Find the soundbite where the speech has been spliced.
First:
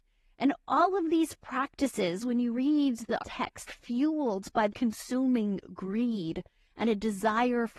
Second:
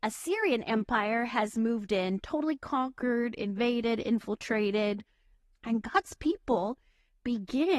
first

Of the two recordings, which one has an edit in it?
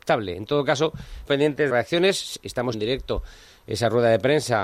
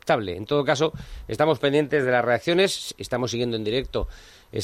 first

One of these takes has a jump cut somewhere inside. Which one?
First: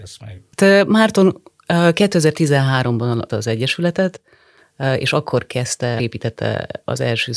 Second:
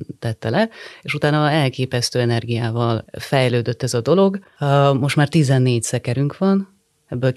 first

